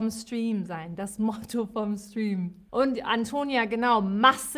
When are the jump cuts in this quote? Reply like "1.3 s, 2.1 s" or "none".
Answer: 2.7 s